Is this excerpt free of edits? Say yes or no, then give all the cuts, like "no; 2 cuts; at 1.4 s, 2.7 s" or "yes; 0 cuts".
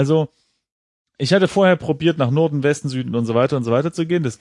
yes; 0 cuts